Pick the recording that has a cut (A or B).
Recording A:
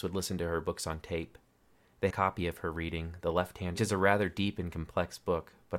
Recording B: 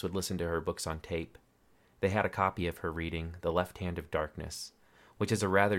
A